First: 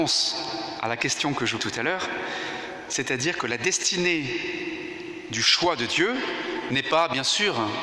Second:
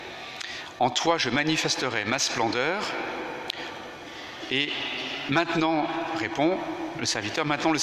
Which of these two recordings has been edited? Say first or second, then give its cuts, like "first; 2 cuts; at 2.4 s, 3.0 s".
first; 1 cut; at 1.6 s